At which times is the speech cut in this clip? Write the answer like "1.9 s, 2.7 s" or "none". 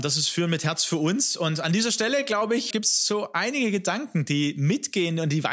2.7 s